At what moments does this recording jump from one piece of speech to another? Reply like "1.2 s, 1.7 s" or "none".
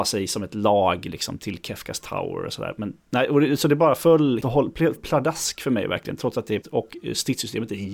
1.4 s, 3.0 s, 4.4 s, 5.0 s, 6.6 s